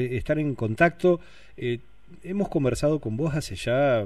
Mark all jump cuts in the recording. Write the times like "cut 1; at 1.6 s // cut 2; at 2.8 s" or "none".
none